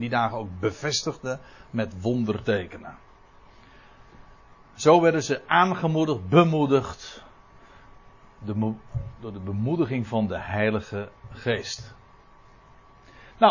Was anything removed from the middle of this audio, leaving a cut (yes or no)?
no